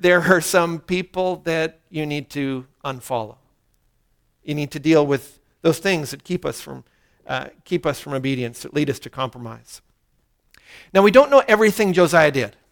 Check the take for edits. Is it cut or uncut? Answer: uncut